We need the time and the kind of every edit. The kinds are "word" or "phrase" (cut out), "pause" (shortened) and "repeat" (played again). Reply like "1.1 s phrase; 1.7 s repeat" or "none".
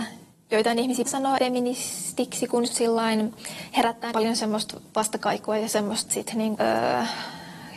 1.1 s word; 1.4 s word; 2.7 s word; 4.1 s word; 6.1 s word; 6.5 s word